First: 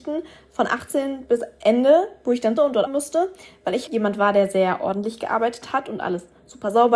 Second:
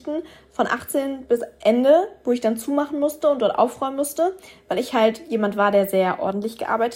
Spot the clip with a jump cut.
first; 3 cuts; at 2.6 s, 2.9 s, 3.9 s

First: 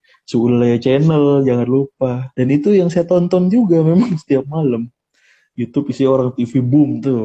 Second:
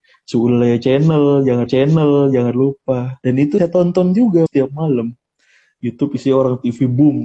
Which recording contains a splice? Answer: second; 3 cuts; at 1.7 s, 3.6 s, 4.5 s

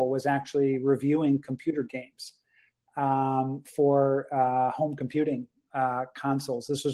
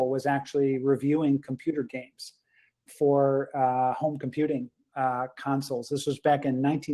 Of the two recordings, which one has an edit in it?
second; 1 cut; at 2.9 s

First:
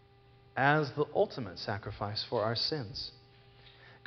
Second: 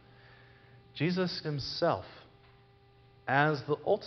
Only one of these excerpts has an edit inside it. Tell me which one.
second; 1 cut; at 1.4 s

